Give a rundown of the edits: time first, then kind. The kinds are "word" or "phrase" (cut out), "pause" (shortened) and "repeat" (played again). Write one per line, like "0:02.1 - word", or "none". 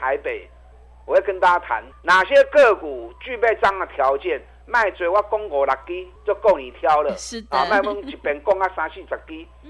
0:01.9 - pause
0:06.2 - pause